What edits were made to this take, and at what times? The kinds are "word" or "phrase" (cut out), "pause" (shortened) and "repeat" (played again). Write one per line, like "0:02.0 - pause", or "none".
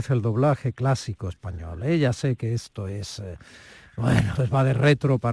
0:04.4 - word